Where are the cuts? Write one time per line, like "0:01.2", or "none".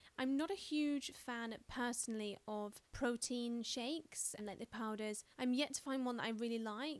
0:02.8
0:04.4
0:04.7
0:05.3